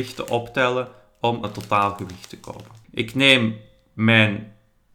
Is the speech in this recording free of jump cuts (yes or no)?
no